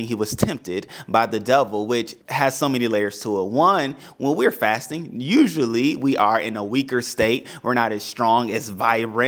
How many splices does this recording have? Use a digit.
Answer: 1